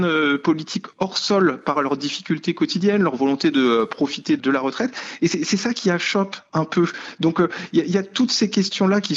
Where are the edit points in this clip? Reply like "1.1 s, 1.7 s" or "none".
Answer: 1.7 s, 4.4 s